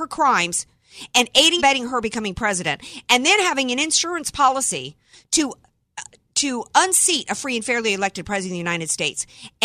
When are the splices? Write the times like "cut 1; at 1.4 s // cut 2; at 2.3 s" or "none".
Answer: cut 1; at 1.6 s